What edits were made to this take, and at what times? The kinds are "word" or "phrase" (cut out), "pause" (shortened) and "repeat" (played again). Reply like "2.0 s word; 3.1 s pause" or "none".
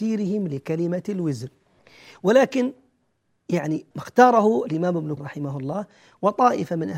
1.8 s pause; 3.9 s word; 5.2 s word